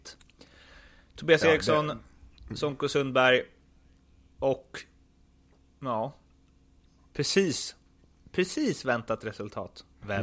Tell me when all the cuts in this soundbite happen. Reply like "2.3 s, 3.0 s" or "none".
none